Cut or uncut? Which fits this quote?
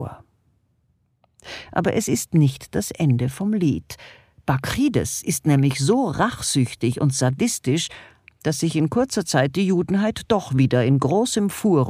uncut